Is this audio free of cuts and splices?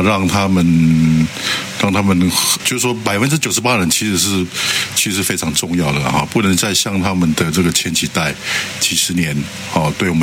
no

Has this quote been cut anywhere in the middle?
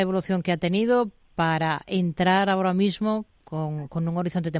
yes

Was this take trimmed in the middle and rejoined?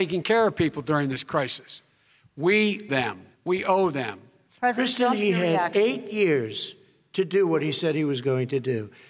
yes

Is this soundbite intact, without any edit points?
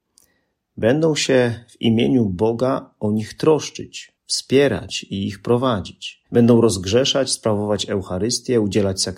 no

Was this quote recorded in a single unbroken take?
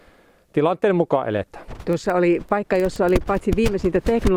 yes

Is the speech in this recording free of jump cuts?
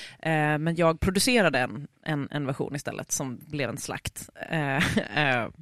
yes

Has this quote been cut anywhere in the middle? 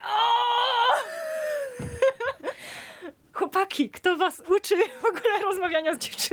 no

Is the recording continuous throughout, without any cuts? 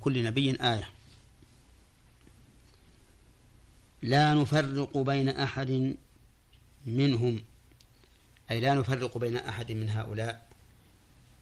yes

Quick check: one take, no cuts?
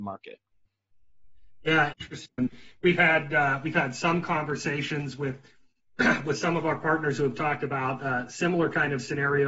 no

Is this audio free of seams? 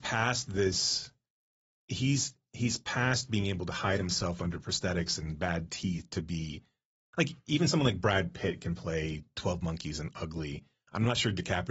yes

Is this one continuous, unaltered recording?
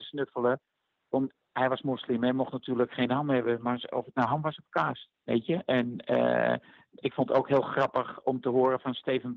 no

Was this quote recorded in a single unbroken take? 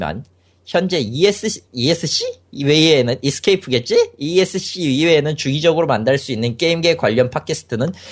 no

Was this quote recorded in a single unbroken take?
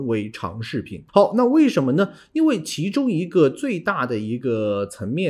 no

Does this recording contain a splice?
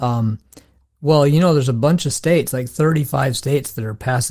no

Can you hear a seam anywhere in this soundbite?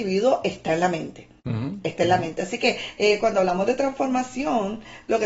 no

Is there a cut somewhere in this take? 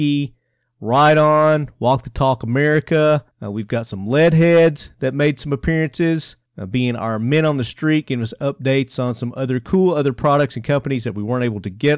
yes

